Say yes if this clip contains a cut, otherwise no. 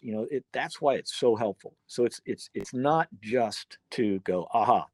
yes